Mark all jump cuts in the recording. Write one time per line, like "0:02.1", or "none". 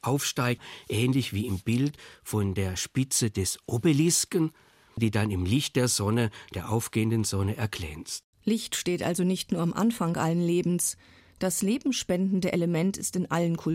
none